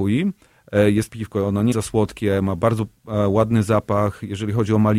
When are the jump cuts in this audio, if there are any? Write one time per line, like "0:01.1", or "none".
0:01.1
0:01.7